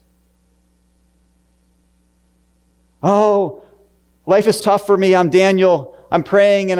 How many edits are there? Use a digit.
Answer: 2